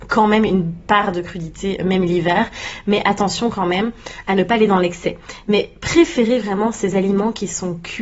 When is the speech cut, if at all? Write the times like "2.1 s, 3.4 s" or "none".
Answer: none